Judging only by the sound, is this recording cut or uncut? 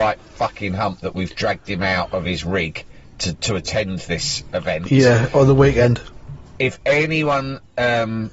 uncut